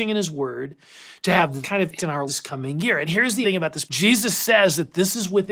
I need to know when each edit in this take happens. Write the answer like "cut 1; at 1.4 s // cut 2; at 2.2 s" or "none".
cut 1; at 1.6 s // cut 2; at 2.0 s // cut 3; at 2.3 s // cut 4; at 3.1 s // cut 5; at 3.4 s // cut 6; at 3.9 s